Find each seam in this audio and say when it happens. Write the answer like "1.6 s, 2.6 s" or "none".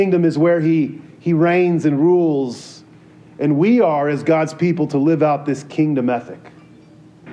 none